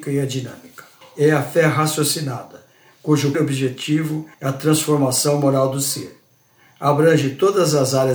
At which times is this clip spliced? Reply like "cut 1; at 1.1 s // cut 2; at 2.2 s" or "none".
cut 1; at 1.0 s // cut 2; at 3.3 s // cut 3; at 4.3 s